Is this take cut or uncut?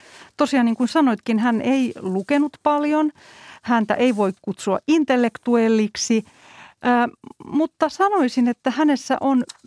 uncut